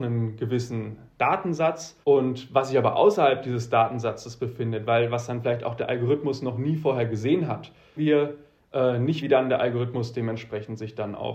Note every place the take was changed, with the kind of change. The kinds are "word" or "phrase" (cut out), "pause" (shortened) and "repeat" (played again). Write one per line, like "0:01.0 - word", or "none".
0:02.0 - pause
0:08.0 - phrase
0:09.2 - word